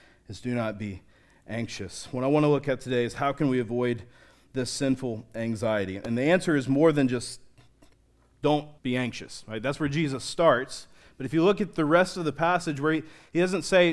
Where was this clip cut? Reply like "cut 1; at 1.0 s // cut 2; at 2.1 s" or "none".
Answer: cut 1; at 8.8 s